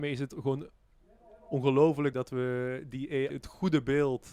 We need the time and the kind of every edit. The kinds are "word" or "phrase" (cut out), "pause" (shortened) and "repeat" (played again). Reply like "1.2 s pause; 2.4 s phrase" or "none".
2.1 s word; 3.3 s word